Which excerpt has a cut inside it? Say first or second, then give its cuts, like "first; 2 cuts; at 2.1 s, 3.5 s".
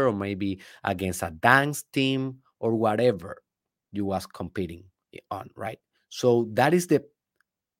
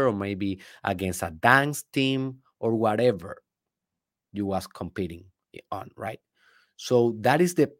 first; 2 cuts; at 3.8 s, 6.0 s